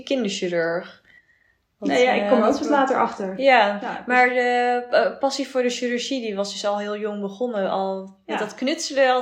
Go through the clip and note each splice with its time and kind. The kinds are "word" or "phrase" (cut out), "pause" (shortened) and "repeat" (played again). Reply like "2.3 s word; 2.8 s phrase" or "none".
none

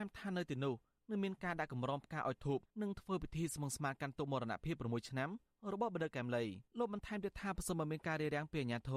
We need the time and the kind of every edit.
2.7 s pause; 6.7 s pause

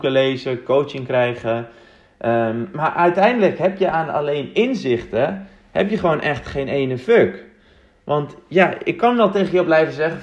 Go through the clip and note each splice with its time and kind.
none

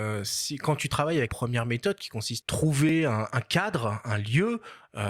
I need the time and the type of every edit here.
1.3 s word; 2.4 s word

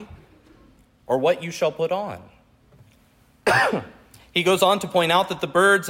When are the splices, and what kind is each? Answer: none

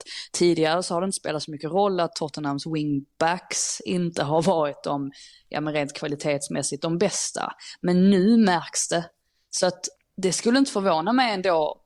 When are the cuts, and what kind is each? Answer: none

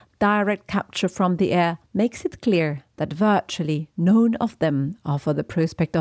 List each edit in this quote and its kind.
1.9 s pause

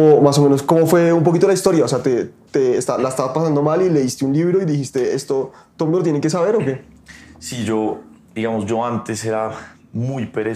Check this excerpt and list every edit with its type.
none

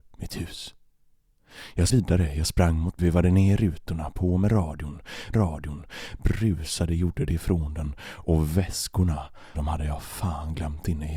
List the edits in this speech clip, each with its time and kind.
1.9 s word; 3.0 s phrase; 5.3 s repeat; 9.5 s word

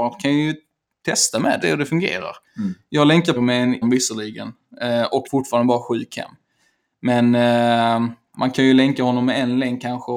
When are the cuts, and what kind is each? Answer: 1.6 s phrase; 3.4 s word; 3.8 s word; 5.3 s phrase; 8.3 s word

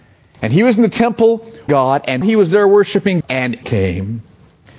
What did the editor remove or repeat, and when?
1.7 s word; 2.2 s word; 3.2 s word; 3.6 s word

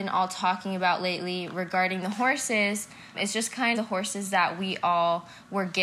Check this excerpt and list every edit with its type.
3.1 s word; 3.7 s word

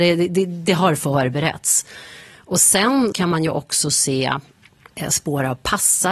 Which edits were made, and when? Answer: 3.1 s word

